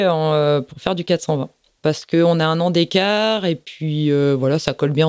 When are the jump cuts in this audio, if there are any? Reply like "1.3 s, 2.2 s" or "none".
none